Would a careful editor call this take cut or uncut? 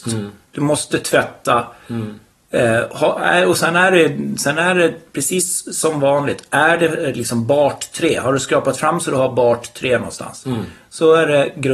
uncut